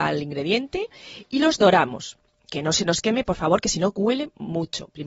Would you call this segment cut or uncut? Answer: uncut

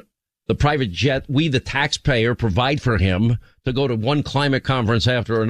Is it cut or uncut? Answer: uncut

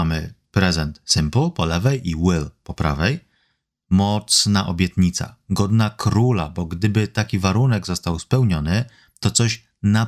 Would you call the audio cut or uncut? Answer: uncut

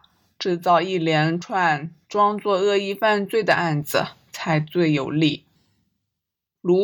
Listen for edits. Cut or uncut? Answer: uncut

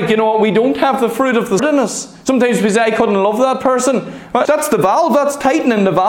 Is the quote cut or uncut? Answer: cut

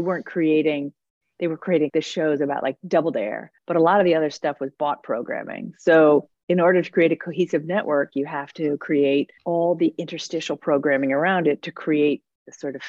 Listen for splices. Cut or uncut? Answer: cut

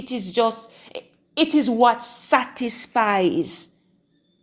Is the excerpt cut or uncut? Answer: uncut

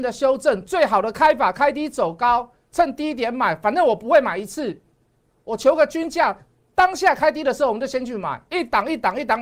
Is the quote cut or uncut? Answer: uncut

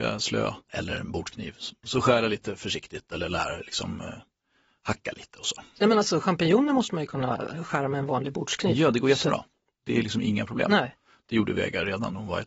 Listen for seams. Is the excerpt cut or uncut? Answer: uncut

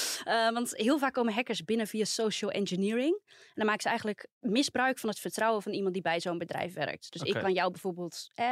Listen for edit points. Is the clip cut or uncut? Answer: uncut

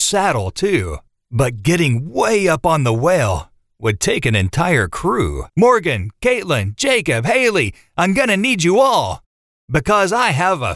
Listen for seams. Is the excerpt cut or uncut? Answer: cut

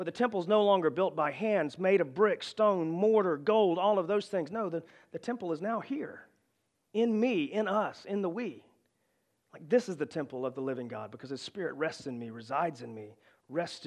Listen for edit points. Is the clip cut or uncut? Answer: uncut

